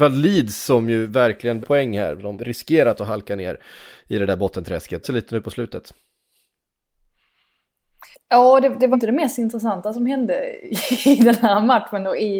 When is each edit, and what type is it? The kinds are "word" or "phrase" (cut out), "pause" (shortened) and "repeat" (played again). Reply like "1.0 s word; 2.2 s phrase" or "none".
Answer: 1.6 s word; 2.3 s word; 5.0 s phrase; 8.1 s pause; 8.9 s word